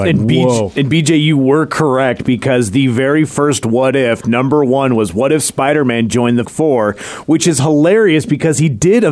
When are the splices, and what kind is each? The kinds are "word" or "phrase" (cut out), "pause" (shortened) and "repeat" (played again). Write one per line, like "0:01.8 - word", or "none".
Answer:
0:06.5 - word